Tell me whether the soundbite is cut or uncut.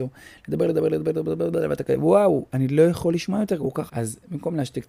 cut